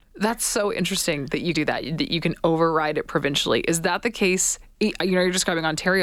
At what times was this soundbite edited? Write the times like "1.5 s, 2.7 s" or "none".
1.5 s